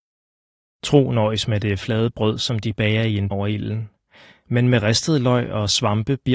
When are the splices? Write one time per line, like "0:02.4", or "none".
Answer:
0:03.3